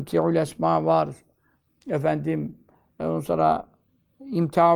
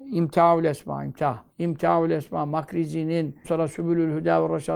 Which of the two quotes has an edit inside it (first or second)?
second